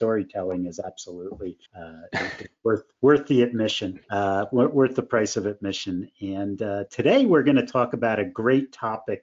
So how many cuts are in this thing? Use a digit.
2